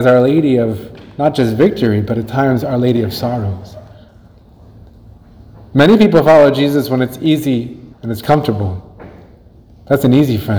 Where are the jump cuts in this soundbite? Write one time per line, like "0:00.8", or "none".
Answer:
0:07.9